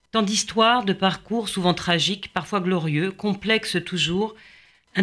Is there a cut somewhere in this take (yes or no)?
no